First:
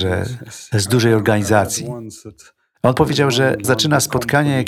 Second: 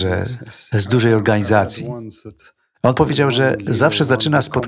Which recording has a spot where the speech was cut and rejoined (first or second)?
first